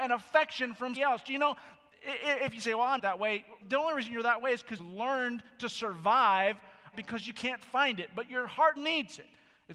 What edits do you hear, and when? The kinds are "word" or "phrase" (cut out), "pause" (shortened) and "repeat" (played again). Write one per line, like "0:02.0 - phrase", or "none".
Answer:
0:01.0 - word
0:03.0 - word
0:03.6 - word
0:04.8 - word
0:06.9 - word
0:08.8 - word